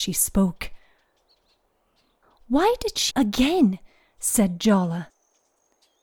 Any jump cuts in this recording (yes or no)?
yes